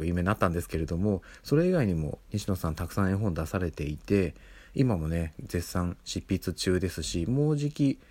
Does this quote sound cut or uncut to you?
uncut